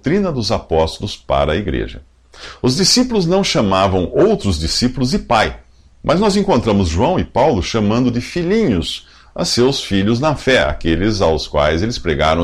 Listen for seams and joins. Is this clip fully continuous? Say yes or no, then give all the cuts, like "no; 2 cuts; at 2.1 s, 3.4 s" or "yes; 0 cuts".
yes; 0 cuts